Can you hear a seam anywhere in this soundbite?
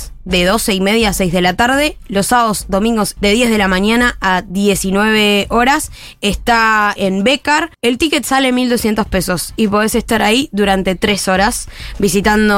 yes; 3 cuts; at 3.2 s, 7.0 s, 7.7 s

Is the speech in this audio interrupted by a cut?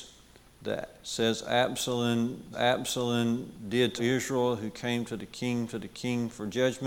yes; 3 cuts; at 2.5 s, 4.0 s, 5.7 s

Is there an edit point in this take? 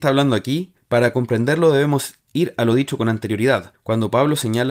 no; 0 cuts

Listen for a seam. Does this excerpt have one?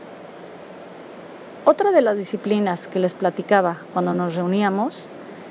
no; 0 cuts

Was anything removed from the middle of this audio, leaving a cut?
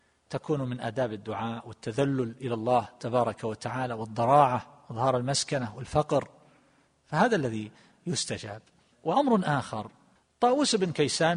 no; 0 cuts

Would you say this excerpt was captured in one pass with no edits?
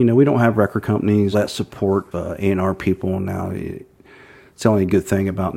no; 2 cuts; at 1.3 s, 2.1 s

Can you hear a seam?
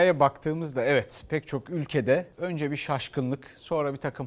yes; 1 cut; at 2.3 s

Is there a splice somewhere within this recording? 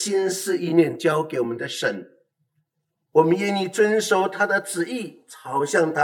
no; 0 cuts

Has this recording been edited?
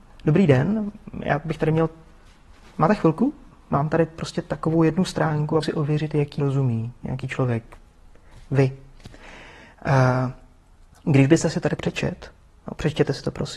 yes; 3 cuts; at 5.6 s, 6.4 s, 11.8 s

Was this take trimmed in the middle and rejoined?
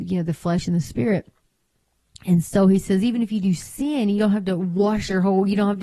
no; 0 cuts

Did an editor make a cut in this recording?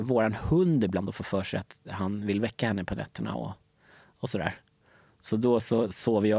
no; 0 cuts

